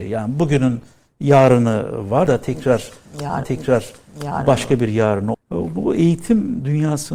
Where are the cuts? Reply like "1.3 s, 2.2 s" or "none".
2.3 s, 3.4 s, 5.3 s